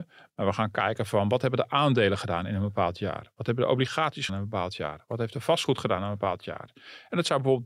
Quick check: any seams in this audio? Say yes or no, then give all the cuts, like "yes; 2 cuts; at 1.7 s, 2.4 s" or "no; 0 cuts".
yes; 1 cut; at 4.3 s